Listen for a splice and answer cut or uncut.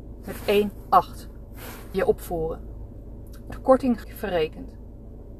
cut